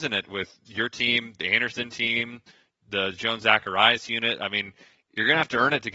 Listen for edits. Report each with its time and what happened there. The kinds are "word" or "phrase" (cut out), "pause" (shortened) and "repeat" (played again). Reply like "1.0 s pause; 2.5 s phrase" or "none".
none